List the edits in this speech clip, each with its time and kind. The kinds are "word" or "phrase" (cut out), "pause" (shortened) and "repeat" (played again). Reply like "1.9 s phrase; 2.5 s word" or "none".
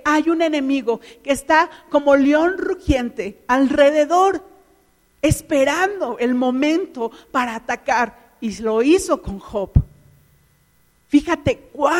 none

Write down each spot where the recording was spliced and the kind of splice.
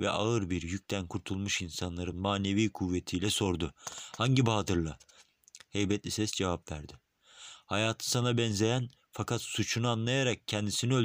none

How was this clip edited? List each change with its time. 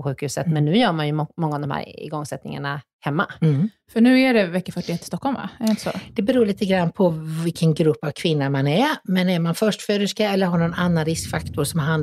none

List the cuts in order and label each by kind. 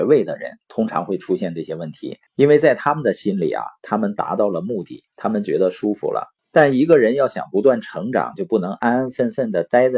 2.3 s pause; 5.1 s pause; 6.4 s pause

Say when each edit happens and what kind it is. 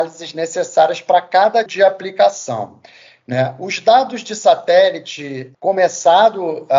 1.7 s word; 5.5 s word

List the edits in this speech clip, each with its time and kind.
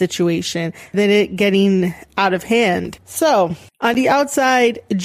0.9 s word

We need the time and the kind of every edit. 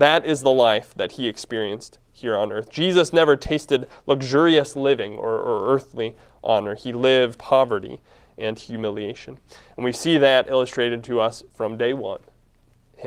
7.4 s word

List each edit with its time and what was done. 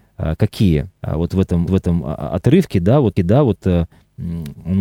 1.0 s pause; 1.7 s repeat; 3.2 s repeat

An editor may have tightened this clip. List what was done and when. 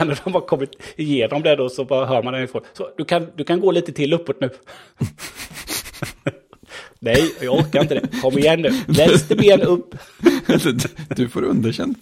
none

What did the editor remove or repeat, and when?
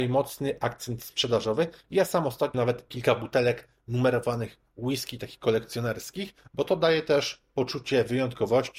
2.5 s word

